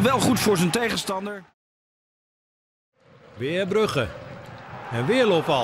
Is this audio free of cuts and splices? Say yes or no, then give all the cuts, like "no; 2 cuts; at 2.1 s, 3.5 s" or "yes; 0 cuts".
yes; 0 cuts